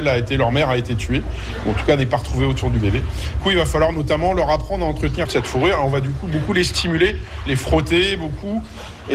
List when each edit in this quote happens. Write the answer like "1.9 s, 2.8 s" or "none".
3.4 s, 5.2 s